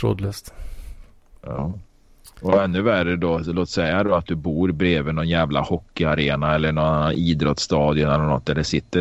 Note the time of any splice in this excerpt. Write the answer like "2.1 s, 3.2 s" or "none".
none